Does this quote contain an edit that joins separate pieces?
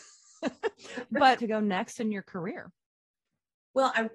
yes; 1 cut; at 1.4 s

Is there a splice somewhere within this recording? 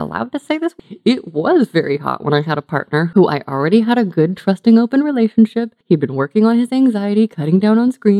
yes; 1 cut; at 5.8 s

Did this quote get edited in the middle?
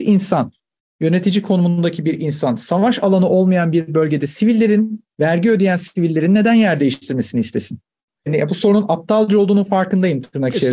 no; 0 cuts

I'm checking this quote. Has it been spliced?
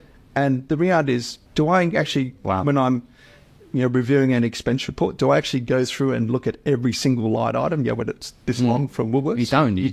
yes; 1 cut; at 1.5 s

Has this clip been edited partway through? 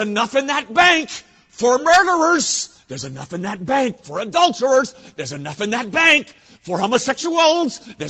no; 0 cuts

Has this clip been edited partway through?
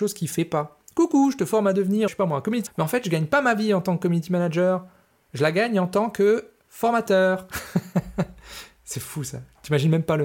yes; 2 cuts; at 2.1 s, 2.7 s

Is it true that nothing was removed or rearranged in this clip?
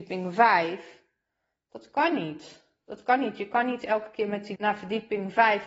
no; 1 cut; at 4.6 s

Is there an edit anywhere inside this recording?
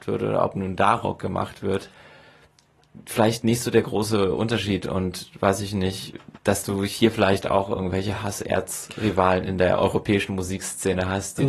yes; 1 cut; at 6.4 s

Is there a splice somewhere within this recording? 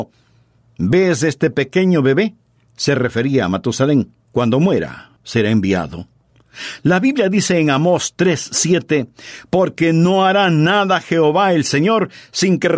yes; 2 cuts; at 4.2 s, 5.2 s

